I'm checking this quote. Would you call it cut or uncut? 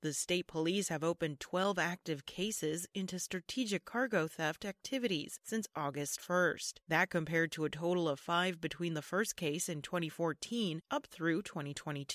uncut